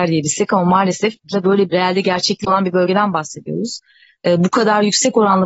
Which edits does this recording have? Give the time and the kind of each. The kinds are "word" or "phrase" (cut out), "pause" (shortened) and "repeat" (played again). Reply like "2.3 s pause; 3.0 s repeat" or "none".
1.3 s word; 1.7 s word